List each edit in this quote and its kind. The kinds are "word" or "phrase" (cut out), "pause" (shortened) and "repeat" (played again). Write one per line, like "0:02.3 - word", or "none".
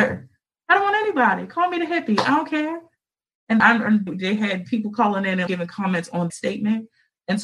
0:03.6 - word
0:04.1 - word
0:05.5 - word
0:06.3 - word